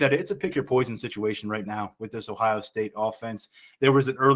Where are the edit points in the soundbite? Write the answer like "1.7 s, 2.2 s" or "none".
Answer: none